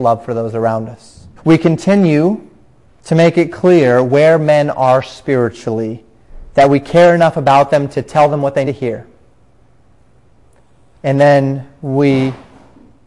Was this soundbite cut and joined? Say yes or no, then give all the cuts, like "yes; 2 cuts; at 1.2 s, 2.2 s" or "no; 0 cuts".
yes; 3 cuts; at 1.4 s, 2.8 s, 8.6 s